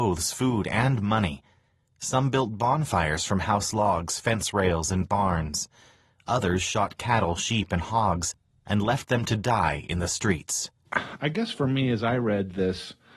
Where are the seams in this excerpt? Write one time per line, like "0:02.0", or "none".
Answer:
none